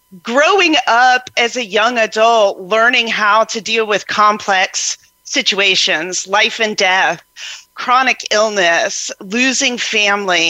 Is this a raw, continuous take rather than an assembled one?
no; 1 cut; at 9.2 s

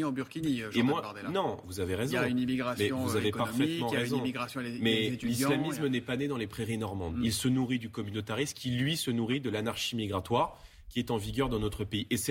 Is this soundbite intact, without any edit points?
yes; 0 cuts

